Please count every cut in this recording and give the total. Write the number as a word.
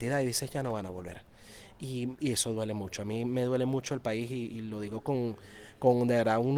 zero